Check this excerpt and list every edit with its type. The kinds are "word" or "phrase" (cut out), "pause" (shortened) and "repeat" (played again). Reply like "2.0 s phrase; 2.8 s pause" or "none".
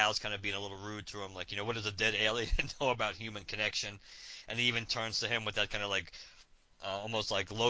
6.7 s word